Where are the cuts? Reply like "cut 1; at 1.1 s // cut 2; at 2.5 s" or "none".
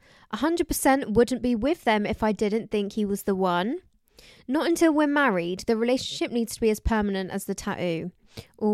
none